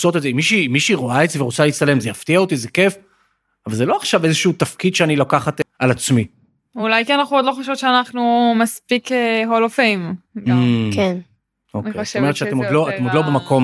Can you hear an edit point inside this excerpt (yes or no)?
no